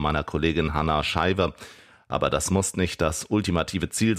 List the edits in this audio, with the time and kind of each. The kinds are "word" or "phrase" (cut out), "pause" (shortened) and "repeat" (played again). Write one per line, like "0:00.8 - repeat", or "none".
none